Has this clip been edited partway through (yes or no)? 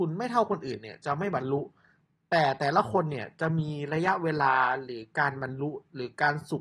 no